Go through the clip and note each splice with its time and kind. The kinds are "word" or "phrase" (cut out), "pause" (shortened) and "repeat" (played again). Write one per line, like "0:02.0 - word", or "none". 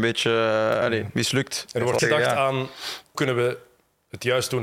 0:02.0 - word
0:03.1 - word